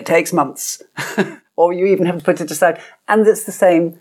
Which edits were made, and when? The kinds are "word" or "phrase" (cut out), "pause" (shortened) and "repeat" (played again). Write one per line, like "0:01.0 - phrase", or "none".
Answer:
none